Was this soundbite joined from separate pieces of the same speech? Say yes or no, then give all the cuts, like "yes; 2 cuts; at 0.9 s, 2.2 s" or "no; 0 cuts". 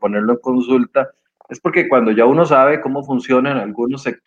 no; 0 cuts